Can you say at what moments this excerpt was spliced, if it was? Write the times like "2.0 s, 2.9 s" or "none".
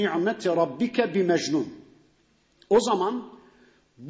none